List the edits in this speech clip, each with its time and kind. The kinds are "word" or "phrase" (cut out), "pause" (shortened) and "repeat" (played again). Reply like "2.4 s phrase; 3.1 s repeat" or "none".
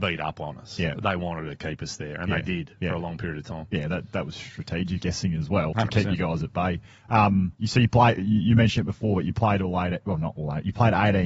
5.0 s word; 5.7 s word; 7.5 s pause